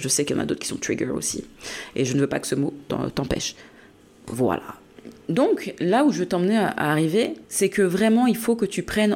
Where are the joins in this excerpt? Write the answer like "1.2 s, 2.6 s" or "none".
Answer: 7.4 s